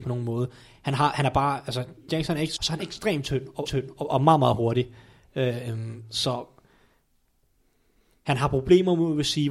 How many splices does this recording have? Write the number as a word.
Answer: three